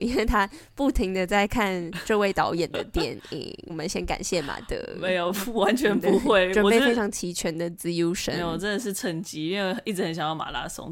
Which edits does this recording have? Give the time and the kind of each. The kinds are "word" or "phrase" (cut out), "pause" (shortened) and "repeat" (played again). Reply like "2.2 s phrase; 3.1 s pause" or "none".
3.7 s phrase